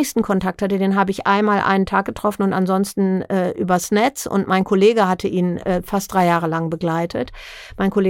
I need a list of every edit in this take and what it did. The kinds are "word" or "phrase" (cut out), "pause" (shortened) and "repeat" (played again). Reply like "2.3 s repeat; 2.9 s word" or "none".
none